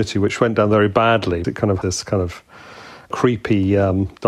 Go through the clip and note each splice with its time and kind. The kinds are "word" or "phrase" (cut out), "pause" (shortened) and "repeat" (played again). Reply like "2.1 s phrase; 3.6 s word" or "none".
1.4 s word; 1.8 s word